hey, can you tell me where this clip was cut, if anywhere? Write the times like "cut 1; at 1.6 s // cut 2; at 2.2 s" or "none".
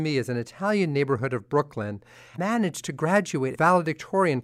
cut 1; at 2.4 s // cut 2; at 3.5 s